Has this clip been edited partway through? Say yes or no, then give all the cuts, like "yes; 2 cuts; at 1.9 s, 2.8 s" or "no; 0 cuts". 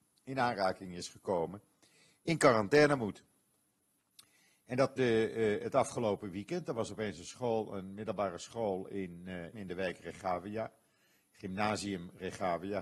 yes; 2 cuts; at 5.0 s, 9.5 s